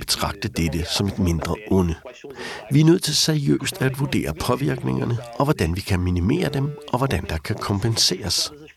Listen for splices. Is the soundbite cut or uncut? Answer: uncut